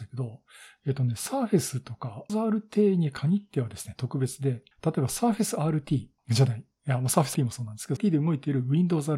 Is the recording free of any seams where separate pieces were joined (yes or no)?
no